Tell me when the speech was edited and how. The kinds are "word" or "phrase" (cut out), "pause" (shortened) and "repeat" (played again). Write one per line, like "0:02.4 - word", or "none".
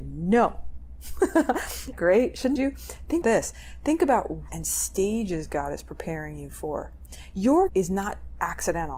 0:01.9 - phrase
0:02.6 - phrase
0:03.2 - word
0:04.5 - word
0:07.7 - word